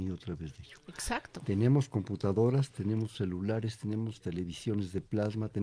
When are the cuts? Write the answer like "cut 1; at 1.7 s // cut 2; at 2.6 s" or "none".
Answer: none